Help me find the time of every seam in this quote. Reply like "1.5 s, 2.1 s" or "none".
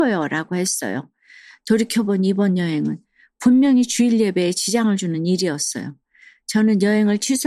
none